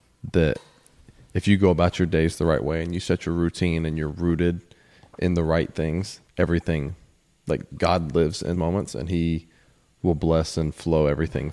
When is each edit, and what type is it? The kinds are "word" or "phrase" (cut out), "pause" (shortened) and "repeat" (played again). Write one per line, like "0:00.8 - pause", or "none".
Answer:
0:06.2 - word
0:08.5 - word

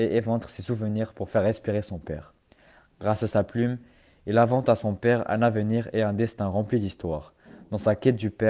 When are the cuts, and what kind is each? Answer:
none

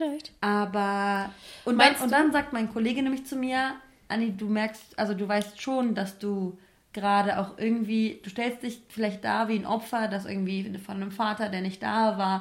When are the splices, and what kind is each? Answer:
none

